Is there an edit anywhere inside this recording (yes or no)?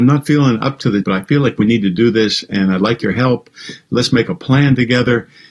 yes